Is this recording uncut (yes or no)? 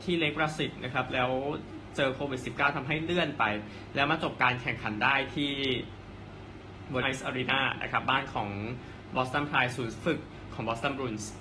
no